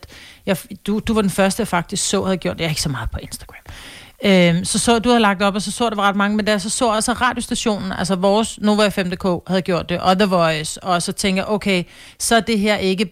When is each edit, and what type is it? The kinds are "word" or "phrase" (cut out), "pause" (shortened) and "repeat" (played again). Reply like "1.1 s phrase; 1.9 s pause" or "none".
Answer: none